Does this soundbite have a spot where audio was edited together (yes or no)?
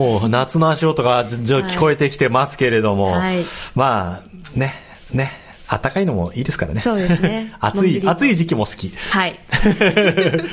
yes